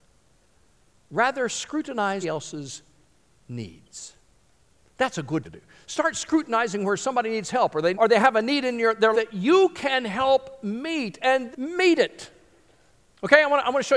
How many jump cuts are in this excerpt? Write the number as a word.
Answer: six